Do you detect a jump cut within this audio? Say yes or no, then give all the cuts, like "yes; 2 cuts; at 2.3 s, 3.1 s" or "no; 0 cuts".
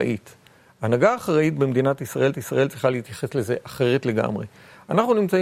yes; 1 cut; at 2.3 s